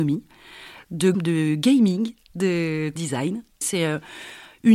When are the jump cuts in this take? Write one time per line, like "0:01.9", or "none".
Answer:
0:01.1
0:03.0